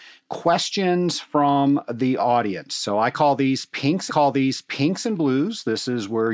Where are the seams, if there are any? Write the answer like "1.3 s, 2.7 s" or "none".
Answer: 4.1 s